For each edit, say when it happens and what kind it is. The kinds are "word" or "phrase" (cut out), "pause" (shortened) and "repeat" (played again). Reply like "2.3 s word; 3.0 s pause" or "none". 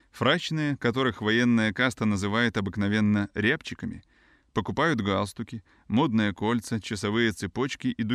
none